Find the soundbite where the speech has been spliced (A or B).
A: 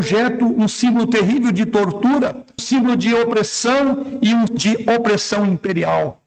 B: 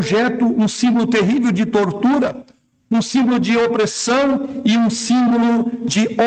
A